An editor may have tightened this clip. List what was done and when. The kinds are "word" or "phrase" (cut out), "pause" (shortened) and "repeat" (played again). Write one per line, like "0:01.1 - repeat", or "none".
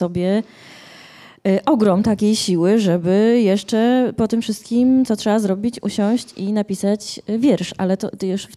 none

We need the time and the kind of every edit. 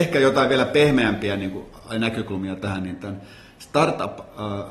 none

